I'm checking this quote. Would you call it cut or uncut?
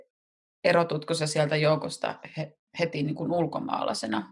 uncut